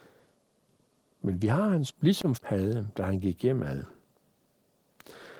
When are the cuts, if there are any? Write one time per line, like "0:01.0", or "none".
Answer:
0:01.9
0:02.4